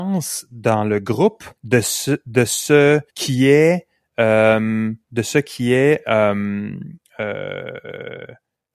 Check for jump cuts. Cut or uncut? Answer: cut